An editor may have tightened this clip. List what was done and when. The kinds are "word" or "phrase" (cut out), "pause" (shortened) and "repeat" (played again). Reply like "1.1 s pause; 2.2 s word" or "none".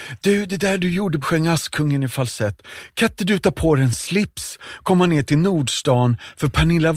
1.2 s phrase